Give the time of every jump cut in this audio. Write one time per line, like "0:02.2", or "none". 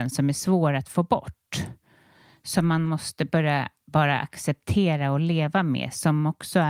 none